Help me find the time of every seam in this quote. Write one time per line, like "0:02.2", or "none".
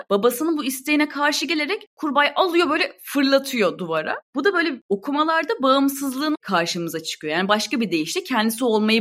0:06.3

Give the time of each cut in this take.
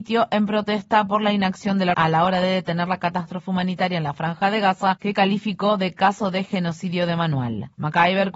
0:01.9

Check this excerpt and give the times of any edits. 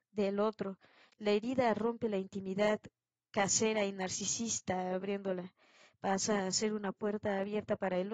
none

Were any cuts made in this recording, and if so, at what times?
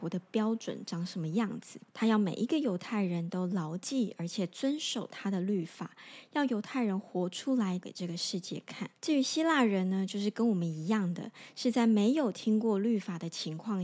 0:01.9
0:07.8
0:09.0

